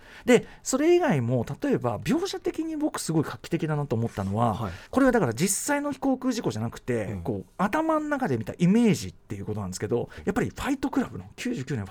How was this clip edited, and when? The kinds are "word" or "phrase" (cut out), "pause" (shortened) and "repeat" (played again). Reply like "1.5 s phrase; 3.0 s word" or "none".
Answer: 4.9 s pause; 10.2 s phrase